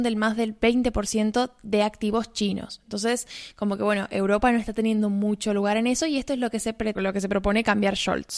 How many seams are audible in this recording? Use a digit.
1